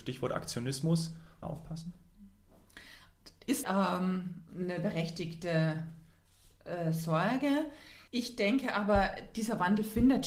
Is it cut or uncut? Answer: cut